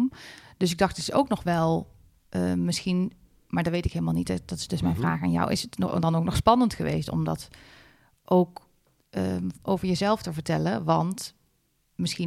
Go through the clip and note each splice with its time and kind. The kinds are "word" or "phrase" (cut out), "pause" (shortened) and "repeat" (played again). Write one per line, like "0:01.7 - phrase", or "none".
none